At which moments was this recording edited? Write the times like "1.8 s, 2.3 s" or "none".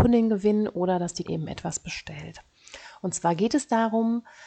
1.2 s

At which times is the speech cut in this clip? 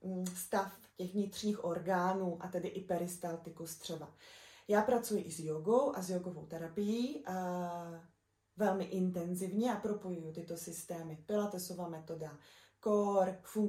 none

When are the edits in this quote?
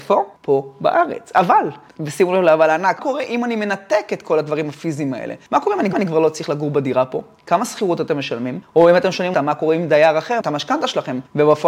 3.0 s, 5.9 s, 9.3 s, 10.4 s

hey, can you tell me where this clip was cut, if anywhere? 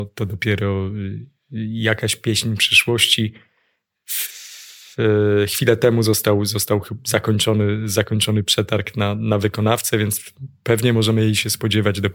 none

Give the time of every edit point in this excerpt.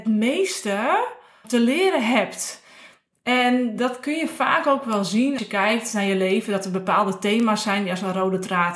1.4 s, 5.4 s

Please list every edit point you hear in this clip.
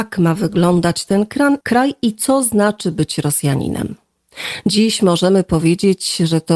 1.6 s

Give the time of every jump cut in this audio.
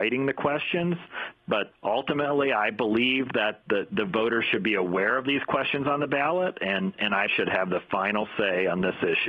3.6 s, 7.3 s

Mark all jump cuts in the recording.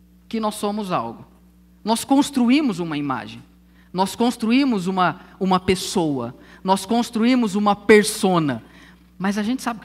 none

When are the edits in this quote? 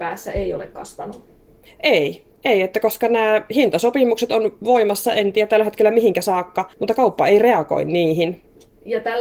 2.3 s, 6.7 s

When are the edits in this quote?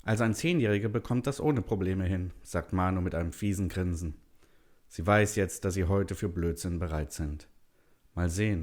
none

